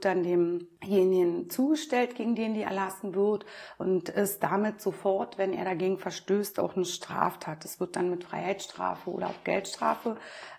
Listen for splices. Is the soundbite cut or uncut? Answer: uncut